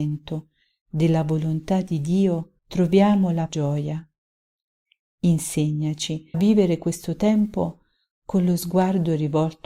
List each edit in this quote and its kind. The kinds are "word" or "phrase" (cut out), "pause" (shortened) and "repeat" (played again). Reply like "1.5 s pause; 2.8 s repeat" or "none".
2.6 s pause; 3.5 s phrase; 6.3 s word